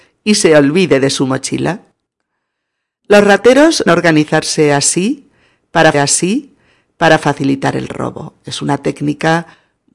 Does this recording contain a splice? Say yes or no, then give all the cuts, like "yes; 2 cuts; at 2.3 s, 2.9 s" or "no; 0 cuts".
yes; 2 cuts; at 3.9 s, 5.9 s